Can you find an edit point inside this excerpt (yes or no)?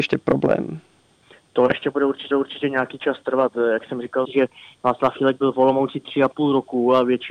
yes